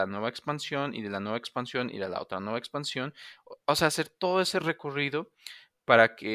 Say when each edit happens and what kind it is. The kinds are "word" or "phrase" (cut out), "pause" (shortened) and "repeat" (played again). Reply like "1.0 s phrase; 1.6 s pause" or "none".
none